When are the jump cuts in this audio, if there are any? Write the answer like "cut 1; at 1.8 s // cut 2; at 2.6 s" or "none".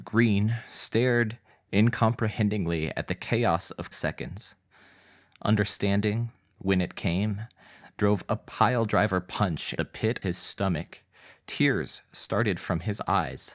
cut 1; at 3.9 s // cut 2; at 9.8 s // cut 3; at 10.2 s